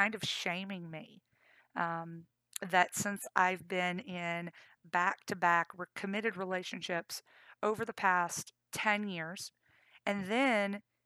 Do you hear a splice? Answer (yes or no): no